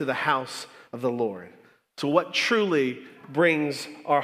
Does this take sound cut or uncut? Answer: uncut